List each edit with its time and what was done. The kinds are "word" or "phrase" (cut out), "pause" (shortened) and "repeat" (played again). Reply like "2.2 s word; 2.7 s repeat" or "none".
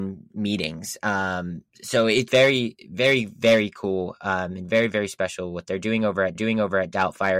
2.3 s word; 6.4 s repeat